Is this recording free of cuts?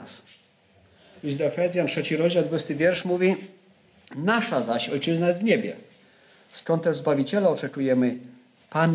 yes; 0 cuts

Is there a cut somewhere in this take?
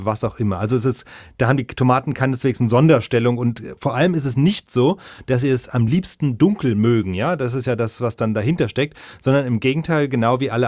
no; 0 cuts

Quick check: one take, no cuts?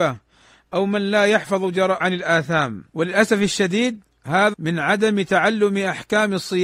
no; 3 cuts; at 2.0 s, 2.9 s, 4.5 s

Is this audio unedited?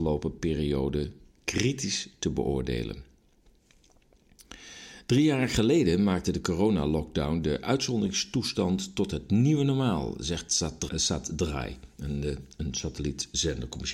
no; 1 cut; at 10.9 s

